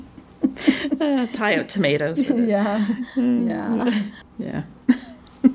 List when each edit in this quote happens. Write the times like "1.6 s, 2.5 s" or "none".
none